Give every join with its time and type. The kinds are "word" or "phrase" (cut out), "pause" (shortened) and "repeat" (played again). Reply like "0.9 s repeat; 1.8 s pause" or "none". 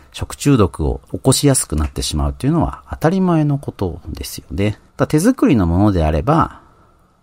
1.0 s pause; 4.9 s pause